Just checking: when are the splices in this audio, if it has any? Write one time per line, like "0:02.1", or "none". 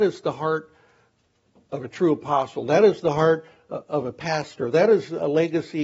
none